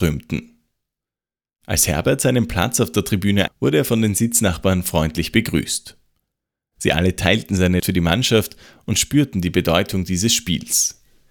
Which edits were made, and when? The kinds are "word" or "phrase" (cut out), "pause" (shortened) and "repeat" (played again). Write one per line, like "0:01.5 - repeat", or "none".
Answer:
0:03.5 - word
0:07.8 - word